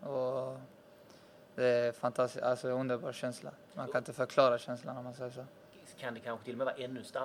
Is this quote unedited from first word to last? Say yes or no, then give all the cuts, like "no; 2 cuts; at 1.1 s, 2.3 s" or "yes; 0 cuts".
yes; 0 cuts